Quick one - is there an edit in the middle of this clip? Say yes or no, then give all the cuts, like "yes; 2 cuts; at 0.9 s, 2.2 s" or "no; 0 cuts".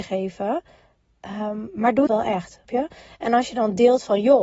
yes; 2 cuts; at 2.1 s, 2.6 s